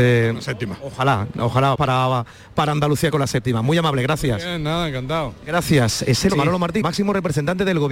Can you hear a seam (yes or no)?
yes